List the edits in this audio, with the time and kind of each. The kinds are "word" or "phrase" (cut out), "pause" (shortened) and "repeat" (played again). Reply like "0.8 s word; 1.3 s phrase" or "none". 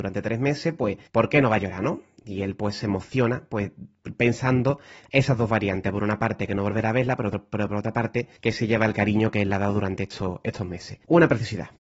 1.1 s pause; 8.4 s pause; 11.0 s pause